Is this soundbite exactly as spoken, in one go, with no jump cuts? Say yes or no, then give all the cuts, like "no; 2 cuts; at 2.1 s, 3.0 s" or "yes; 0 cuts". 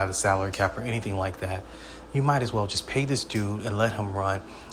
yes; 0 cuts